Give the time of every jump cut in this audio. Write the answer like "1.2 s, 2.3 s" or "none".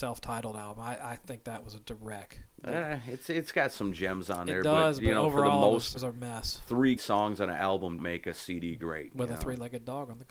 1.8 s, 6.0 s, 7.0 s, 8.0 s